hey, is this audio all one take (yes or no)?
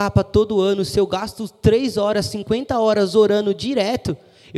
yes